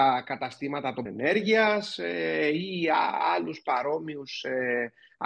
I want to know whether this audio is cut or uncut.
cut